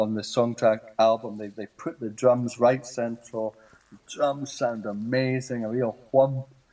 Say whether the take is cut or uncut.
uncut